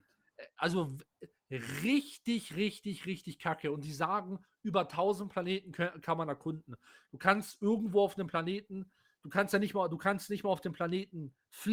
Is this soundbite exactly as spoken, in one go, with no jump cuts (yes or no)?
yes